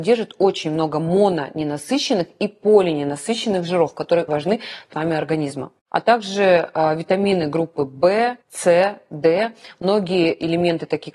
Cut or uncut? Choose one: cut